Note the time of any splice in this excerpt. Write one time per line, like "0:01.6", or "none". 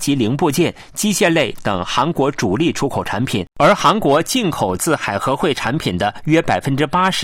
0:03.5